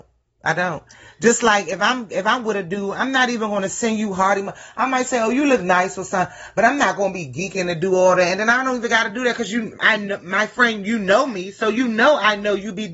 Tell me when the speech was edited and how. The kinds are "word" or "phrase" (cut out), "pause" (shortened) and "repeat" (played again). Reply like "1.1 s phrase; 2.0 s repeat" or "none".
none